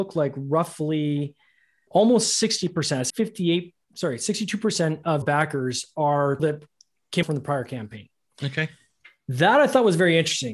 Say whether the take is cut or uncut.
cut